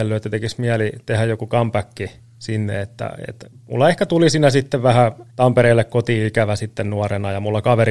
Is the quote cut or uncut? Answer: cut